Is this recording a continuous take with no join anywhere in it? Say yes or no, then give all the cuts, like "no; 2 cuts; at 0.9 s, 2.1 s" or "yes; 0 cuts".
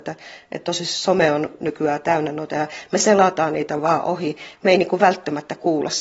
no; 1 cut; at 2.5 s